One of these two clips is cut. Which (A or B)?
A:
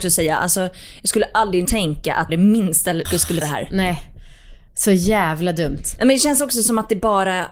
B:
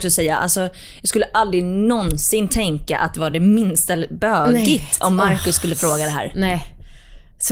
A